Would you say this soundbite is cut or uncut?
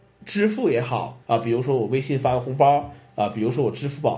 cut